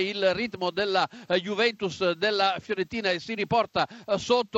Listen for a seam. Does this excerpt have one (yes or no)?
no